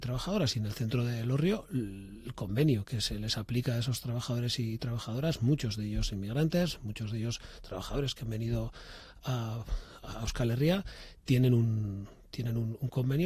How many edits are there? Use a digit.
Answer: 0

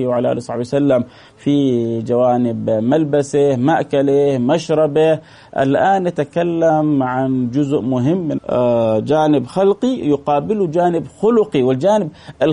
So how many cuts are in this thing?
1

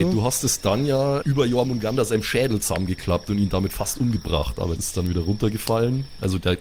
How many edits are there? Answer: 2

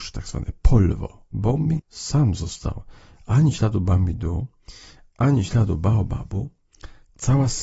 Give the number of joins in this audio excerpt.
2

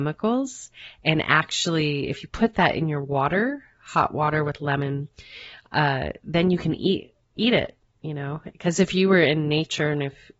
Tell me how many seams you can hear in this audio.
0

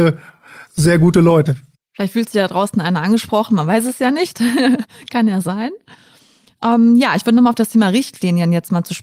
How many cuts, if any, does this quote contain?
0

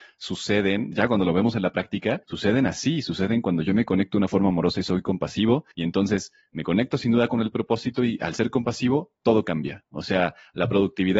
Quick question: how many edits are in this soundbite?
3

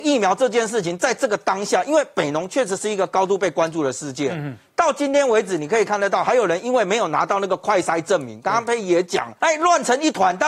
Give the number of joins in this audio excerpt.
1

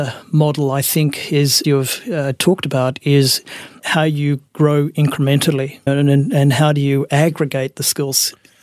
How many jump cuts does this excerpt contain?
2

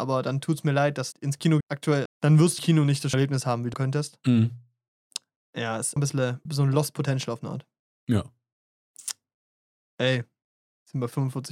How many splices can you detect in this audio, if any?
8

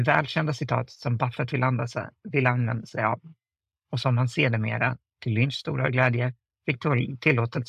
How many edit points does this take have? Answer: 0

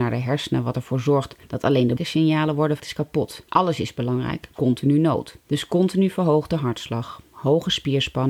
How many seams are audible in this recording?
6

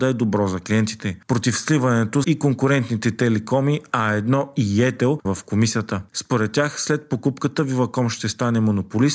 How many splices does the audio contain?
2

